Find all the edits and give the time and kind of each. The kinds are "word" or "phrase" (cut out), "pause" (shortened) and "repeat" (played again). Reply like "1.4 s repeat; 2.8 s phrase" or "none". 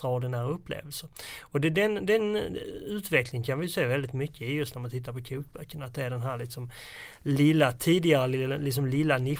none